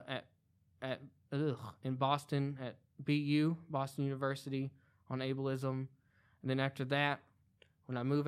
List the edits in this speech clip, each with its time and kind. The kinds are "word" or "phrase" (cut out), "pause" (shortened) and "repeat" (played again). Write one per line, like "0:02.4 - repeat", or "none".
none